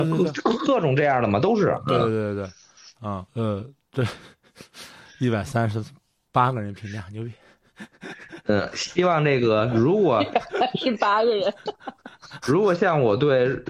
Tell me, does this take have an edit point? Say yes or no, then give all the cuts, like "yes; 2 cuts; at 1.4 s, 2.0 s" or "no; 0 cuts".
no; 0 cuts